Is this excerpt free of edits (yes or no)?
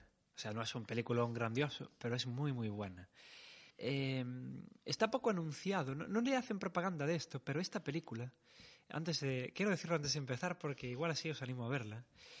no